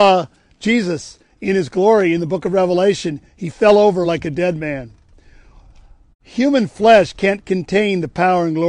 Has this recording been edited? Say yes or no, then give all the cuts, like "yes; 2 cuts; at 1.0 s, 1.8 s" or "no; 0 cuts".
no; 0 cuts